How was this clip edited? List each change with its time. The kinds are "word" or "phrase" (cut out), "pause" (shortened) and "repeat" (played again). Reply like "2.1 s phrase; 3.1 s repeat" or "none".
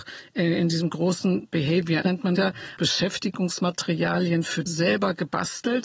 2.0 s word; 2.4 s word; 2.8 s word; 4.7 s word